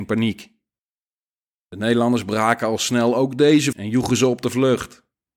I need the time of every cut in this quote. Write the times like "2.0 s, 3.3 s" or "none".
3.7 s